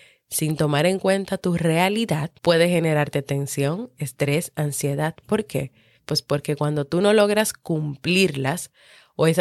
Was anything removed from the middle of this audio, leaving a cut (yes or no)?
yes